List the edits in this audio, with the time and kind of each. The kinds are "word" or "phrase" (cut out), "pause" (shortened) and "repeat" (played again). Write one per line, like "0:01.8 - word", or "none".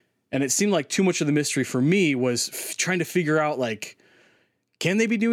none